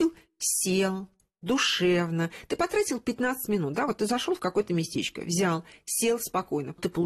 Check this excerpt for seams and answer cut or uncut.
uncut